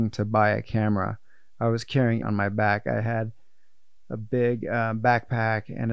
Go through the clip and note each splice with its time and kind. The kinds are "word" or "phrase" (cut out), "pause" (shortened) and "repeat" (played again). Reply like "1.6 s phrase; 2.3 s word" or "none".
2.2 s word